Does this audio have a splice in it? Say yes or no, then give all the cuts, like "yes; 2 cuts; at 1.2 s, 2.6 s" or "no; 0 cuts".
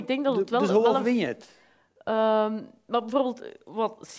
no; 0 cuts